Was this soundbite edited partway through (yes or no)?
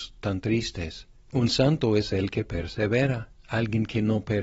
no